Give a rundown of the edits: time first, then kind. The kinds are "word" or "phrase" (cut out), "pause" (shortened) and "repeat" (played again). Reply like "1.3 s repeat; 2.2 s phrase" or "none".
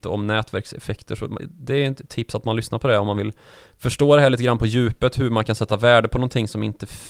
none